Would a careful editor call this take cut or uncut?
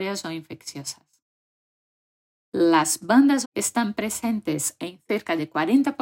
cut